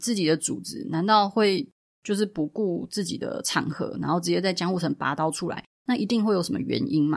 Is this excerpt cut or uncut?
uncut